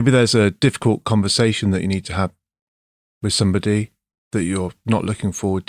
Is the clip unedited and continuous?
yes; 0 cuts

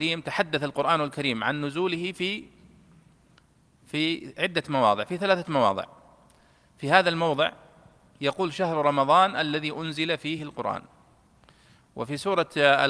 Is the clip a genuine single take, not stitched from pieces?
yes; 0 cuts

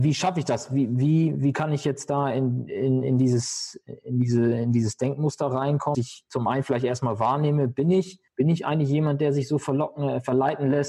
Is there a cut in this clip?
yes; 2 cuts; at 5.9 s, 8.3 s

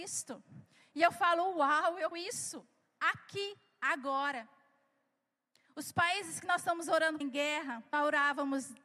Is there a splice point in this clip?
yes; 3 cuts; at 2.1 s, 7.2 s, 7.9 s

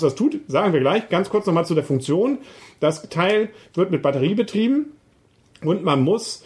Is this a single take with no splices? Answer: yes; 0 cuts

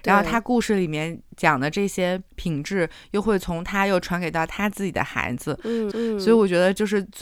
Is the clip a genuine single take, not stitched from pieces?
no; 2 cuts; at 2.3 s, 5.9 s

